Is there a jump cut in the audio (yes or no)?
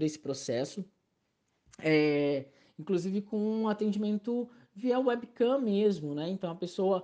no